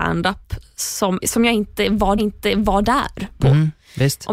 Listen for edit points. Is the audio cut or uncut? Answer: cut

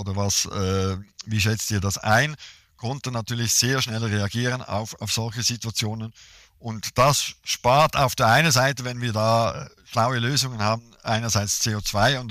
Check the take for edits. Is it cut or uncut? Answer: uncut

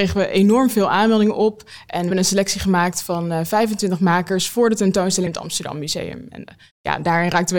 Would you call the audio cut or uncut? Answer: cut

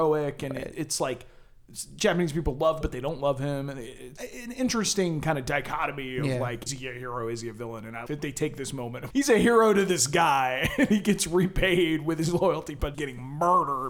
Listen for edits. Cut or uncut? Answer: cut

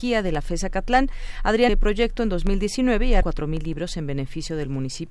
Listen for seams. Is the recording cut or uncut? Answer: cut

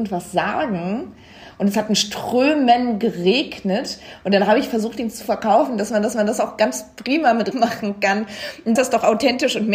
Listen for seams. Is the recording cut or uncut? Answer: cut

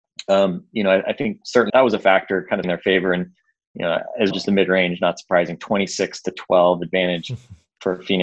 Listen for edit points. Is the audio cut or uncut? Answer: cut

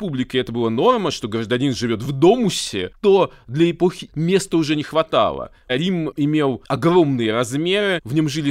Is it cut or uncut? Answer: cut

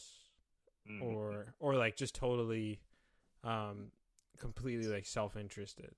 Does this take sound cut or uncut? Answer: uncut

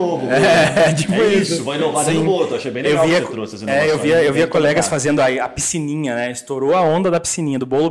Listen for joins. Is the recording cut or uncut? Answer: uncut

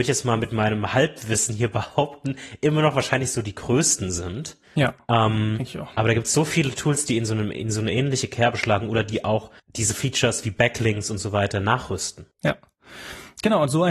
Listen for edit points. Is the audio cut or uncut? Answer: cut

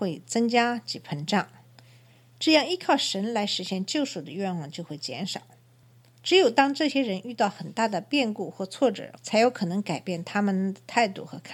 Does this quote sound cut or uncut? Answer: cut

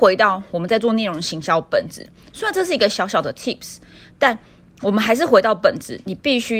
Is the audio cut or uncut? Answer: uncut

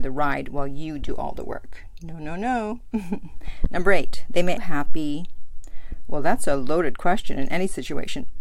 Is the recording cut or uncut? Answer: cut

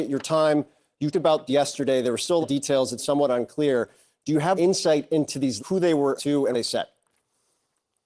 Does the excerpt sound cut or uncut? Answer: cut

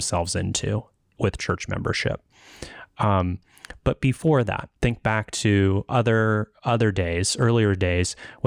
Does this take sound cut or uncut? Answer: cut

